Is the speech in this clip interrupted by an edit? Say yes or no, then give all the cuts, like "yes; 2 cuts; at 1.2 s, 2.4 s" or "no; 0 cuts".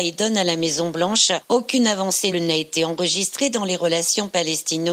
yes; 1 cut; at 2.3 s